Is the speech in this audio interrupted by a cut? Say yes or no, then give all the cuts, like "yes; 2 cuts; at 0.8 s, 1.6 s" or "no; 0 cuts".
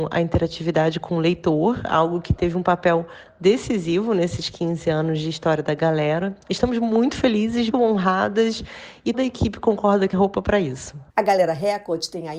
yes; 5 cuts; at 6.4 s, 7.7 s, 9.1 s, 10.1 s, 11.1 s